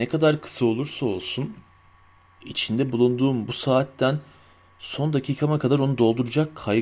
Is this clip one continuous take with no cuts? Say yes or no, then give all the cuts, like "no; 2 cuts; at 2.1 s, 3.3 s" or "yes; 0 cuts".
yes; 0 cuts